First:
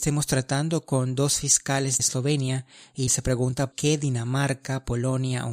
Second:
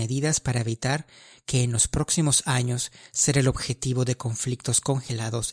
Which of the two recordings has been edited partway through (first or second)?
first